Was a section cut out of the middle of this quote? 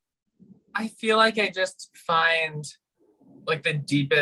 no; 0 cuts

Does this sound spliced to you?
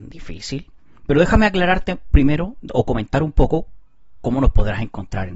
no; 0 cuts

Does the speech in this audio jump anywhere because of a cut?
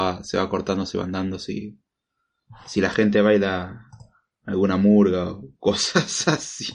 no; 0 cuts

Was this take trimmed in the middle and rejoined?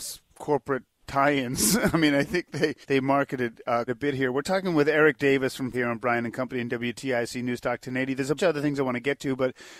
yes; 4 cuts; at 2.8 s, 3.9 s, 5.7 s, 8.4 s

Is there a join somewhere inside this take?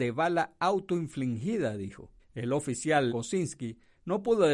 yes; 2 cuts; at 2.2 s, 3.1 s

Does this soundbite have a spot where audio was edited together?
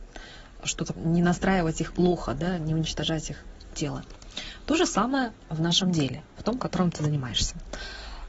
yes; 1 cut; at 1.0 s

